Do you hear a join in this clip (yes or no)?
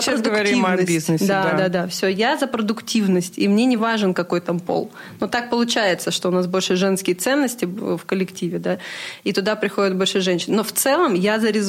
no